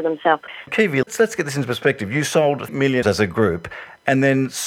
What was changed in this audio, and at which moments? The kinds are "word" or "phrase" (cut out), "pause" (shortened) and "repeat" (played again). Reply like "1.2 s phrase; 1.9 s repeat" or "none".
1.0 s word; 2.7 s word; 3.0 s word